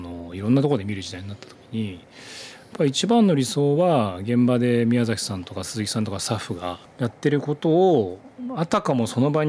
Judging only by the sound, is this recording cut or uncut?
cut